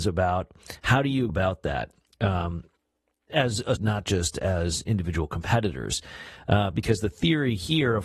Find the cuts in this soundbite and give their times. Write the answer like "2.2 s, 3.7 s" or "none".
1.3 s, 3.3 s, 3.8 s